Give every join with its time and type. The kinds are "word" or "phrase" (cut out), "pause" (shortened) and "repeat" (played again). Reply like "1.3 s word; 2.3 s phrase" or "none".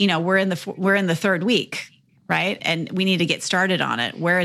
2.6 s word